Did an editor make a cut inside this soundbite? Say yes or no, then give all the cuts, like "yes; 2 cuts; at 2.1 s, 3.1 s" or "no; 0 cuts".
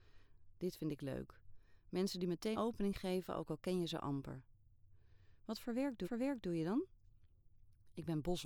yes; 2 cuts; at 2.5 s, 6.0 s